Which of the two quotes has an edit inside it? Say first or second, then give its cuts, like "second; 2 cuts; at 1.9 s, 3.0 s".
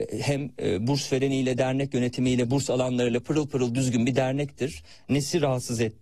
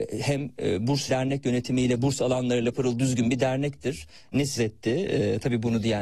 second; 3 cuts; at 1.1 s, 2.7 s, 4.6 s